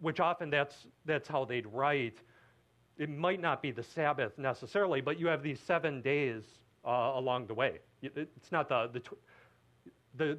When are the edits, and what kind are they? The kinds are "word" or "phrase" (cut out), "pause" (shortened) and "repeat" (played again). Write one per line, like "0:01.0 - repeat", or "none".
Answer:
none